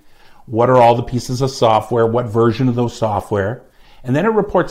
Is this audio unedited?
yes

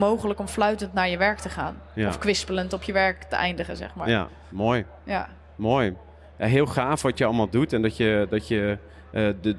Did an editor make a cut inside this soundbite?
no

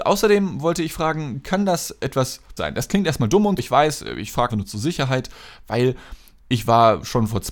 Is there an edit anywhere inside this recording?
yes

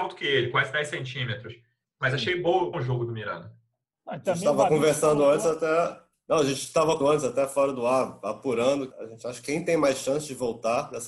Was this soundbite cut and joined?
yes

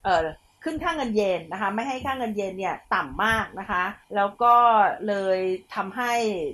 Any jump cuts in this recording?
yes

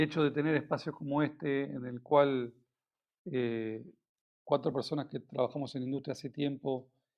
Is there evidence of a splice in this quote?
no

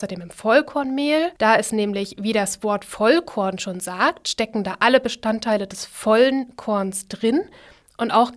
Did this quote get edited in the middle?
yes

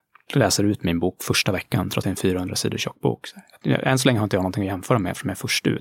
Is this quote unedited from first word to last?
no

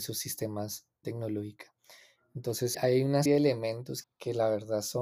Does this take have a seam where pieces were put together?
yes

